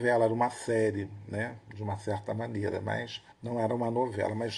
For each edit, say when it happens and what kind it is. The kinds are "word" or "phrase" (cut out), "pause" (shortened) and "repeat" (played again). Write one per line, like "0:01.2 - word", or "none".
0:03.3 - pause